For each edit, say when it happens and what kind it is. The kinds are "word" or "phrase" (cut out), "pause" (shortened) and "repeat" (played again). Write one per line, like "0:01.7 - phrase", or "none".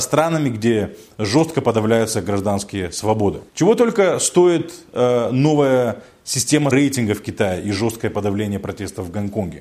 0:03.5 - pause
0:06.7 - word